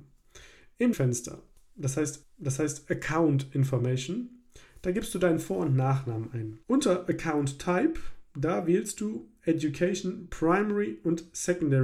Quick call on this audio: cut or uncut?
cut